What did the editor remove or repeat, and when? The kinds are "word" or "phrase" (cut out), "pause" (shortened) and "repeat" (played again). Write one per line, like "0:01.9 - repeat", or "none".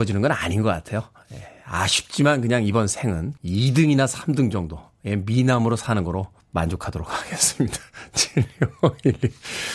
0:03.4 - pause
0:06.4 - pause